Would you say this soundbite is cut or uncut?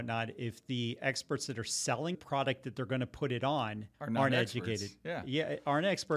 cut